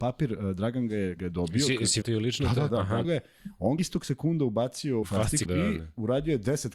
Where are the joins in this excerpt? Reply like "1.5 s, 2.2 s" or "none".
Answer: 1.2 s, 2.0 s, 2.7 s, 3.0 s, 3.8 s, 5.0 s, 5.5 s